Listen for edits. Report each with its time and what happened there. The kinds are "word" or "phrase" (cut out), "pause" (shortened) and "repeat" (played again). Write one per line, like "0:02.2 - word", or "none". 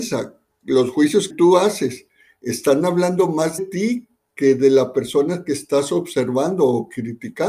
0:01.3 - word
0:03.6 - word